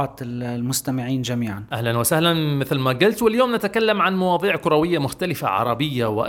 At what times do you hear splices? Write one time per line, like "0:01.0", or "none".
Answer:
none